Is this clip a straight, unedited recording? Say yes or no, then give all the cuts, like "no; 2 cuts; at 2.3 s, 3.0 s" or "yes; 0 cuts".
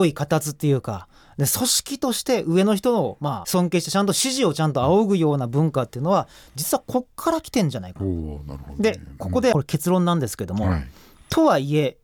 yes; 0 cuts